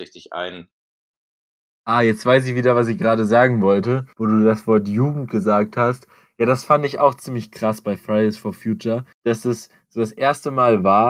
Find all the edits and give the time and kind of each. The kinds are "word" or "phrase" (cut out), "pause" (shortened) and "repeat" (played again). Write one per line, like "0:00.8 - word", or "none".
0:09.1 - pause